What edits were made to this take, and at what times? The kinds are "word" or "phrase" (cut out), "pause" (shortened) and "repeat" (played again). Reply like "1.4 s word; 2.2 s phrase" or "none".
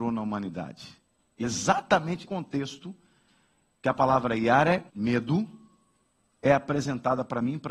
1.4 s word; 2.2 s word; 4.9 s pause